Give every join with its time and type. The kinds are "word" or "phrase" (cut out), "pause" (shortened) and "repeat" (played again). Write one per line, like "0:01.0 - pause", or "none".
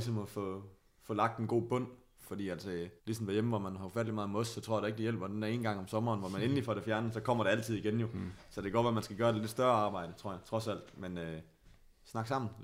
0:03.0 - pause